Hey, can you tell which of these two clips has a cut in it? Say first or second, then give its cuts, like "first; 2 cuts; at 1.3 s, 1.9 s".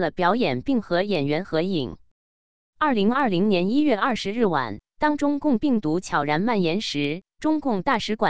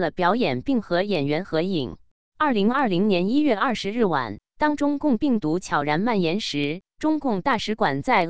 second; 1 cut; at 2.1 s